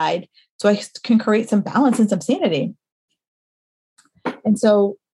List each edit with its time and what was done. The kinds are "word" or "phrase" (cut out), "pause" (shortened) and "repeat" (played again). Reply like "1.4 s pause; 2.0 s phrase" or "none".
none